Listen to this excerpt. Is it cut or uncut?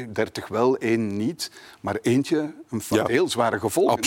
cut